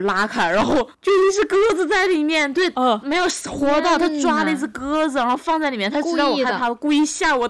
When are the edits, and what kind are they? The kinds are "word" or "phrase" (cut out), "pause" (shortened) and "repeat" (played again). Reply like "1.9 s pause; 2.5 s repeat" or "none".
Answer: 0.9 s pause